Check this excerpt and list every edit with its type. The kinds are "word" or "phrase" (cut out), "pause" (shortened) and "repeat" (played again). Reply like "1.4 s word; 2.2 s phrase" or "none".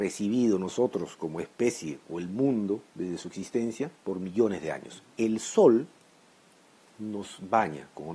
4.0 s pause